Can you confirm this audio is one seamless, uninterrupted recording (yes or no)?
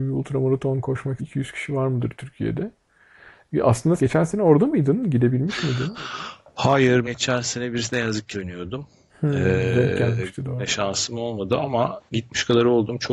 no